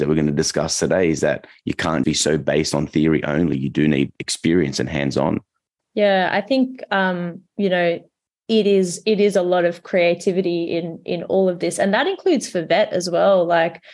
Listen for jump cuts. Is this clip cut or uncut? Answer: cut